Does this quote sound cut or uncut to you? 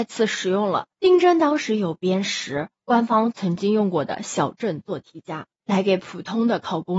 cut